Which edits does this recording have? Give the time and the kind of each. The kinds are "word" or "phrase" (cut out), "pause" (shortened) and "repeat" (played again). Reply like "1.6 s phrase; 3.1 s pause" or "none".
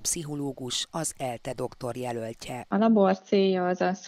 none